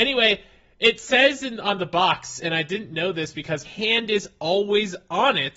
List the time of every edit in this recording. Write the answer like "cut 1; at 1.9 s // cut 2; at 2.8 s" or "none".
cut 1; at 3.6 s

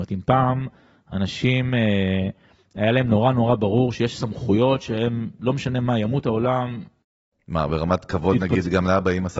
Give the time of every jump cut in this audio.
none

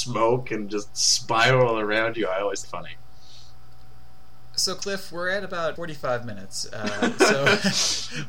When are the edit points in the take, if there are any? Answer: cut 1; at 2.6 s // cut 2; at 5.8 s

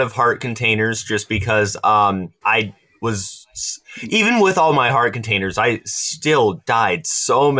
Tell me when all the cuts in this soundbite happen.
cut 1; at 2.4 s

